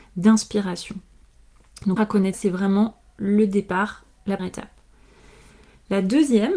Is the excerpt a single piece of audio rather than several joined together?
no; 3 cuts; at 2.0 s, 2.3 s, 4.4 s

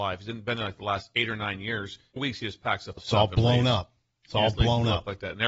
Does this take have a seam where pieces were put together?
yes; 2 cuts; at 2.2 s, 3.0 s

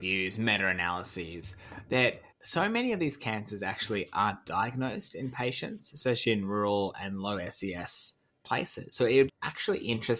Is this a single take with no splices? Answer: no; 3 cuts; at 2.3 s, 8.3 s, 9.3 s

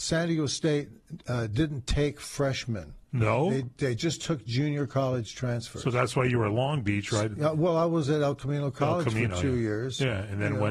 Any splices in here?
yes; 2 cuts; at 3.0 s, 7.4 s

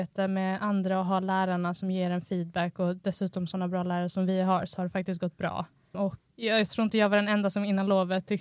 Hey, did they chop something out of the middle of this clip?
no; 0 cuts

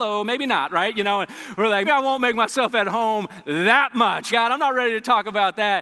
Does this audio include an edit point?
yes; 2 cuts; at 1.9 s, 4.3 s

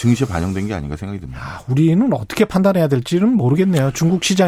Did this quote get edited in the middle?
no; 0 cuts

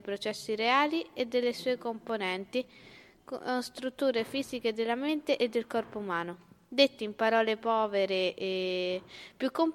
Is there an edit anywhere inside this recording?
no; 0 cuts

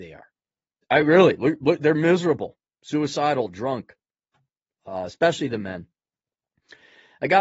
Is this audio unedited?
yes; 0 cuts

